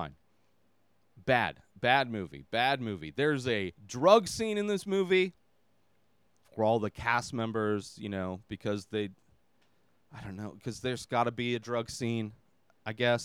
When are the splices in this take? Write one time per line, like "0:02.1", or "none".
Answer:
0:03.8